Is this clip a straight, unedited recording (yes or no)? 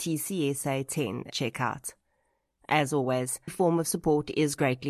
no